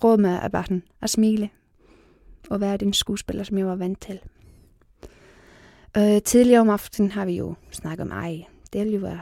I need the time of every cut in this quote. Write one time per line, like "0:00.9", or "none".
none